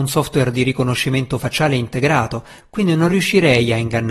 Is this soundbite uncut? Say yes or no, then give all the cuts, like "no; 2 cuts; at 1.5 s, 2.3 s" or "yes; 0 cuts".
yes; 0 cuts